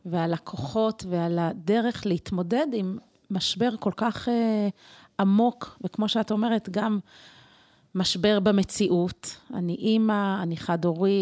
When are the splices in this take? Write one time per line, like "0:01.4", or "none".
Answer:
none

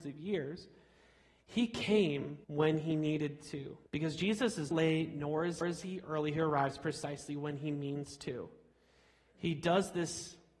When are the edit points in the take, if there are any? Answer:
0:02.4
0:03.9
0:04.7
0:05.6

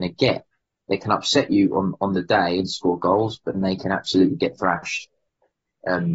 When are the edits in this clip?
0:03.5

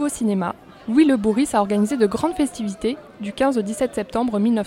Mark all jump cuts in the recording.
none

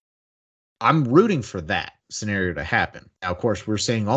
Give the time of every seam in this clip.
0:02.0
0:03.2

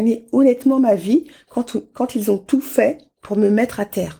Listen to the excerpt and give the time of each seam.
none

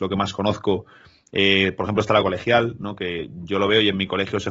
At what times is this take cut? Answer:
0:02.2

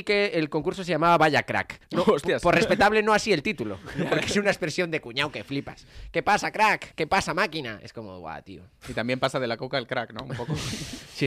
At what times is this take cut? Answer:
0:01.8

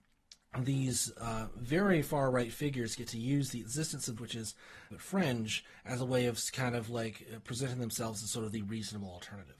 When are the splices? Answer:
0:04.2
0:04.9

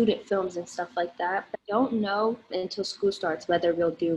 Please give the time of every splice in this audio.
0:01.5
0:02.5

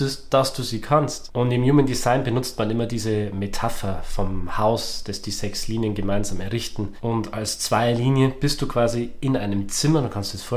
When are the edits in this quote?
none

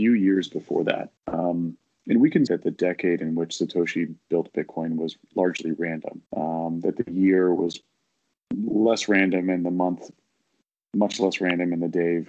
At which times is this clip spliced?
0:01.2
0:02.5
0:06.3

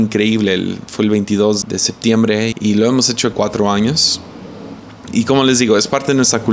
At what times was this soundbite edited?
0:01.6
0:02.5
0:03.3

